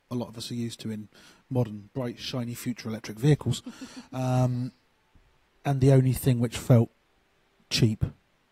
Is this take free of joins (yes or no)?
yes